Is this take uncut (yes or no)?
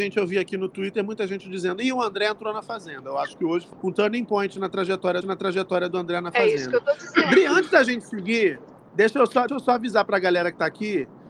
no